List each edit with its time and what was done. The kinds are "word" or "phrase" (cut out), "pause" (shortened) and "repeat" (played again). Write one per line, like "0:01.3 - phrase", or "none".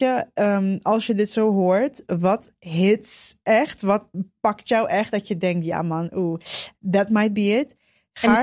none